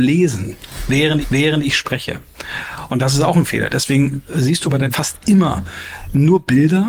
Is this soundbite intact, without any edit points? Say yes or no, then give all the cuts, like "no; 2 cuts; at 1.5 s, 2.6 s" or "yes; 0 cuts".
no; 2 cuts; at 1.2 s, 4.9 s